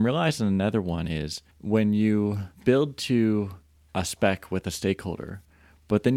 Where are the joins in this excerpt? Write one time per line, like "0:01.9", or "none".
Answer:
0:01.5
0:02.5